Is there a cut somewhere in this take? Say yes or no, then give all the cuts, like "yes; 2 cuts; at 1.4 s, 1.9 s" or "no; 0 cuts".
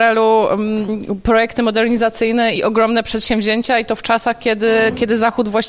yes; 1 cut; at 2.6 s